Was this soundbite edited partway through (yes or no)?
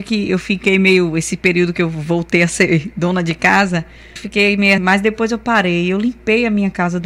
yes